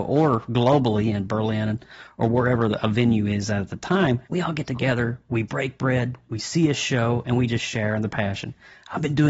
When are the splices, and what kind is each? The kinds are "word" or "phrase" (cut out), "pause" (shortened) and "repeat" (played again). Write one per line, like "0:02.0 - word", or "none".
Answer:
0:04.2 - pause